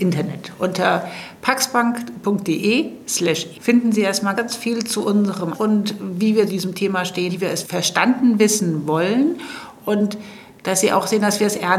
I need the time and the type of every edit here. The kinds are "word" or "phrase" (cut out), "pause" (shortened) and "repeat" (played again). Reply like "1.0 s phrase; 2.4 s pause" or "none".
3.5 s word; 4.4 s word; 5.5 s word; 6.5 s word; 7.3 s word; 7.6 s word